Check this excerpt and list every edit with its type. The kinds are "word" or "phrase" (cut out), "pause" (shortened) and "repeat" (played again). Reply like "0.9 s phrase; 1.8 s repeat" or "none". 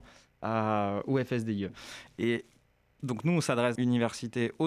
3.8 s word